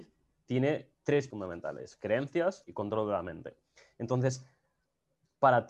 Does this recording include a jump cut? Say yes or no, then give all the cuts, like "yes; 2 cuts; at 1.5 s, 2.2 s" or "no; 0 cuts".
yes; 2 cuts; at 1.3 s, 2.6 s